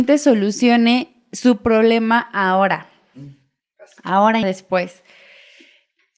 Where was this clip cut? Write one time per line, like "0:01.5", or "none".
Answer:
0:04.4